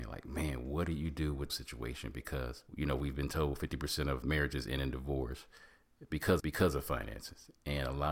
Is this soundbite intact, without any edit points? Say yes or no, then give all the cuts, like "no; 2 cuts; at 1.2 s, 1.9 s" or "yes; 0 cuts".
no; 4 cuts; at 1.5 s, 2.7 s, 4.2 s, 6.4 s